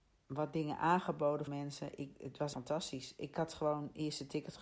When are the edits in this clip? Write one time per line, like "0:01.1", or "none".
0:01.5
0:02.5